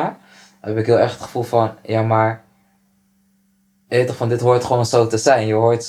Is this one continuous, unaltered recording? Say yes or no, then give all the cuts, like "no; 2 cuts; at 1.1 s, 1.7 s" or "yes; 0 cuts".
yes; 0 cuts